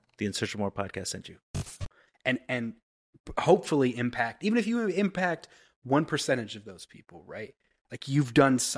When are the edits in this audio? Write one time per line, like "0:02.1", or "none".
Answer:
none